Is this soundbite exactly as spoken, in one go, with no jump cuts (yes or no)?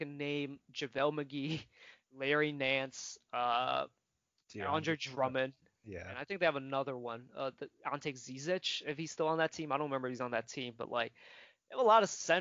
yes